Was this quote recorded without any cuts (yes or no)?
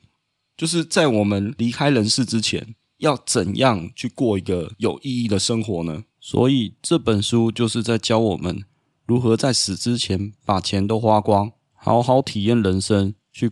no